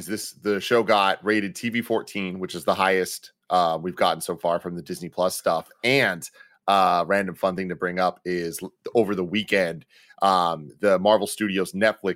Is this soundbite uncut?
yes; 0 cuts

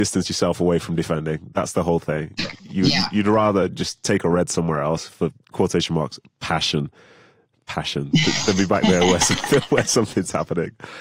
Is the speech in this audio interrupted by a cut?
no; 0 cuts

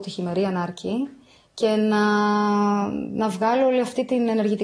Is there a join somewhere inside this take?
no; 0 cuts

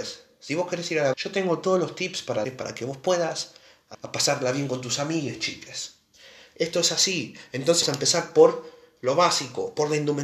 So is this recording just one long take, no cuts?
no; 4 cuts; at 1.1 s, 2.4 s, 3.9 s, 7.8 s

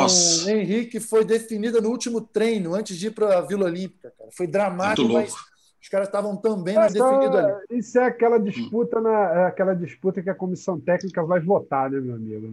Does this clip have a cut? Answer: yes; 2 cuts; at 5.0 s, 6.9 s

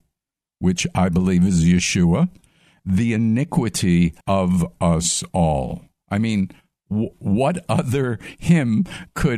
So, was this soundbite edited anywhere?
yes; 1 cut; at 4.2 s

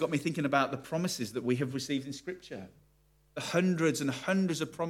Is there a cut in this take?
no; 0 cuts

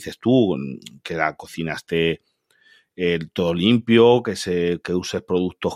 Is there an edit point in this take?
no; 0 cuts

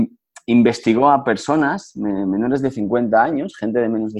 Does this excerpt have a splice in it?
no; 0 cuts

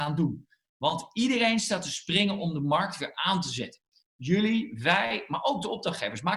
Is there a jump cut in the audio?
no; 0 cuts

